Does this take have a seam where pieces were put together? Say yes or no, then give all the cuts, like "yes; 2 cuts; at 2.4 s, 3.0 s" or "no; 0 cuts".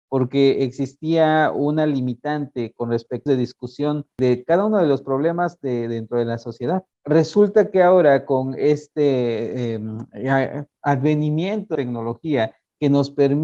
yes; 3 cuts; at 3.3 s, 6.9 s, 11.7 s